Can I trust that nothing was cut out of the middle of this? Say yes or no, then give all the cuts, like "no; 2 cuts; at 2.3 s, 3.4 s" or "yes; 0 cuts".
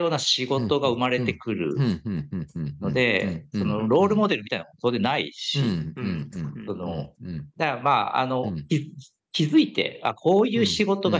no; 1 cut; at 7.5 s